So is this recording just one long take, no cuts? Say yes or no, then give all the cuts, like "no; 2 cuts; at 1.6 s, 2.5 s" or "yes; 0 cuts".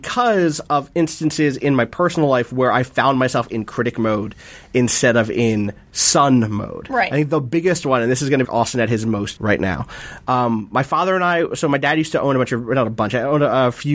no; 3 cuts; at 5.8 s, 8.4 s, 9.4 s